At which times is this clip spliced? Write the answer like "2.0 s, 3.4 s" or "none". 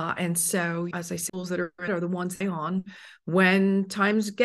0.9 s, 1.3 s, 1.9 s, 2.4 s